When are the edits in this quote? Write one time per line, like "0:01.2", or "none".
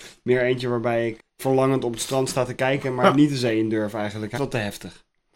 0:01.2
0:04.3